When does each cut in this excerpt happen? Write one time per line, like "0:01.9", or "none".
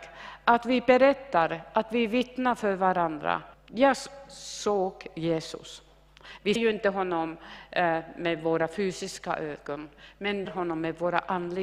0:03.5
0:06.6
0:10.5